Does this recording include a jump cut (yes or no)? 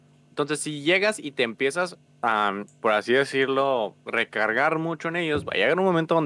yes